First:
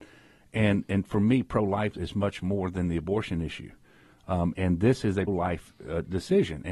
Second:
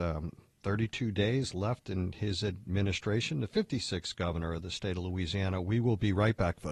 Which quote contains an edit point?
first; 3 cuts; at 1.9 s, 4.5 s, 5.3 s

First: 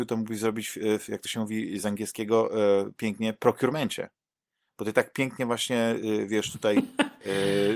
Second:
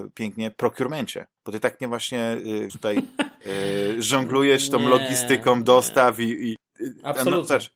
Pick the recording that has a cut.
second; 3 cuts; at 1.4 s, 1.8 s, 2.7 s

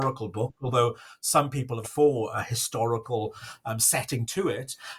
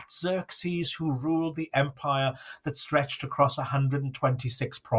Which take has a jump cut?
first; 2 cuts; at 1.8 s, 2.3 s

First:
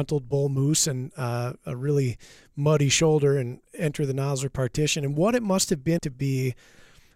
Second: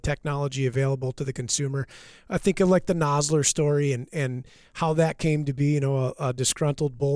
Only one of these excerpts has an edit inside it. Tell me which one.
first; 1 cut; at 6.0 s

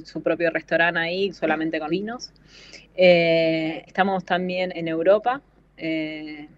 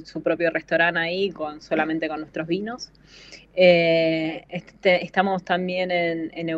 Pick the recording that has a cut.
first; 4 cuts; at 1.3 s, 1.9 s, 3.9 s, 4.7 s

